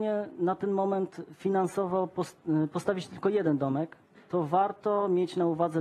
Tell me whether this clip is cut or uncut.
uncut